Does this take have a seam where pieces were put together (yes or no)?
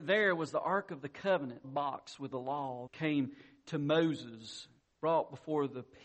yes